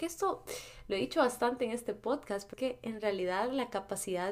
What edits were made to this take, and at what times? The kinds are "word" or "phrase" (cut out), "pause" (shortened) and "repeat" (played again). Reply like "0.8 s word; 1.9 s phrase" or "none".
2.5 s word